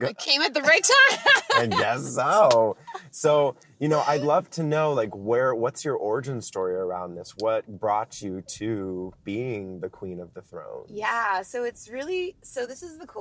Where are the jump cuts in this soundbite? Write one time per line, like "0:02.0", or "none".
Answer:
none